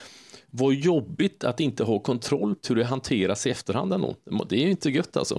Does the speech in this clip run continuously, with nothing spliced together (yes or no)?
no